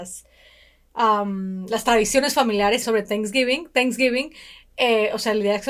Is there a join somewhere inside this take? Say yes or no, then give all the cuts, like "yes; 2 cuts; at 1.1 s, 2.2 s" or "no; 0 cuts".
yes; 1 cut; at 2.8 s